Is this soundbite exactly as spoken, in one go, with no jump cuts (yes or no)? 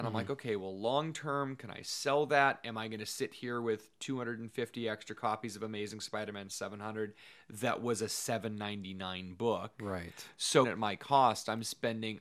no